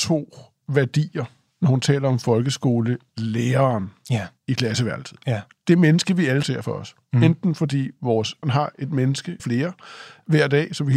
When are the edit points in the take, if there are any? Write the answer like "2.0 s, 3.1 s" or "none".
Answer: 4.4 s, 5.5 s, 6.4 s, 8.4 s, 9.4 s